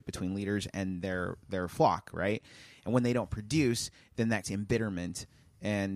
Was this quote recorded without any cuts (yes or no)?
no